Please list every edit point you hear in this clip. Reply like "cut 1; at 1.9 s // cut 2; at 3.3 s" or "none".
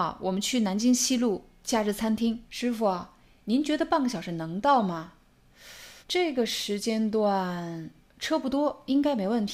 cut 1; at 2.5 s // cut 2; at 6.0 s